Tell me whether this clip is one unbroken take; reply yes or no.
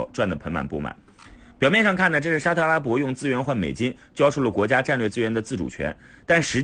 yes